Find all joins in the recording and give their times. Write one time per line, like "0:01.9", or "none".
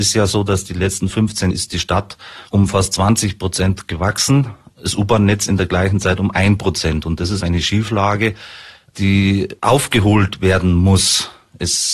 0:01.5
0:02.5
0:07.4